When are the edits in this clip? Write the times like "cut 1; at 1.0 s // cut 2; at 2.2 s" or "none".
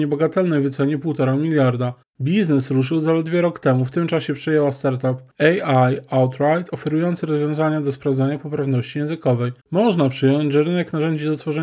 cut 1; at 2.0 s // cut 2; at 9.6 s